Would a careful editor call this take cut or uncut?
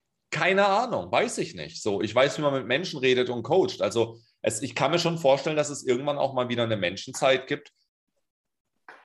uncut